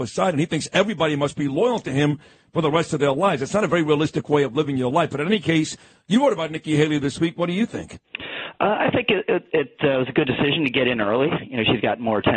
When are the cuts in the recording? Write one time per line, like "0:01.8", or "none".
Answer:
none